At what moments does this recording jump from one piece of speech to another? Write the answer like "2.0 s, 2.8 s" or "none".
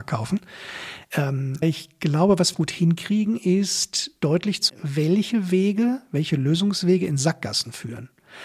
1.6 s, 2.5 s, 4.7 s

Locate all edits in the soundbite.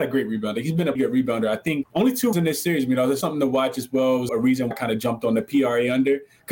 1.0 s, 1.8 s, 2.3 s, 3.2 s, 4.3 s, 4.7 s

